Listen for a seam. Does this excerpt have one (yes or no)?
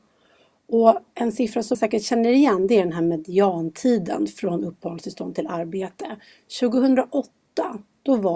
yes